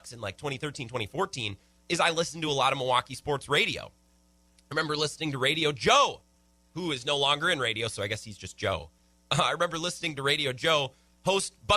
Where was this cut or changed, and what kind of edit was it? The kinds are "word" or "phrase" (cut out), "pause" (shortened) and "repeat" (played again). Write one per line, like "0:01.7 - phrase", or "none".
none